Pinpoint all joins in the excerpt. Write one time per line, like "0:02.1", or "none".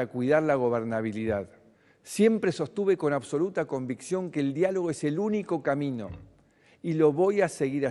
0:01.7